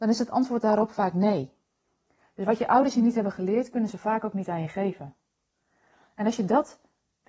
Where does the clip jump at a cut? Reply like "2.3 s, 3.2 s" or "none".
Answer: none